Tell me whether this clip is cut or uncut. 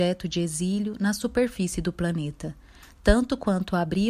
uncut